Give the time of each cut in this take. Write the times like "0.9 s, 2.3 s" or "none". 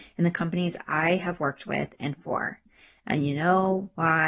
none